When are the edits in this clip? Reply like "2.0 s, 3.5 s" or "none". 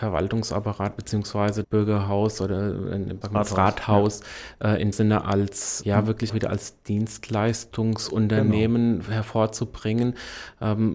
1.6 s, 3.2 s, 4.9 s, 5.8 s, 6.3 s